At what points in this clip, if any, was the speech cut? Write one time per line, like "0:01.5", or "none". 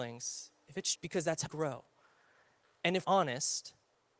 0:00.9
0:01.5
0:03.0